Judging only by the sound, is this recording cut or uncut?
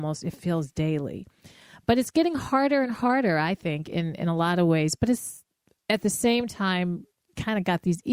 uncut